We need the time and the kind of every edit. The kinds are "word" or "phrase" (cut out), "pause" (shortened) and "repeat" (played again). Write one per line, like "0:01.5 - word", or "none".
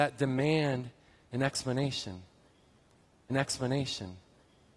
0:03.3 - repeat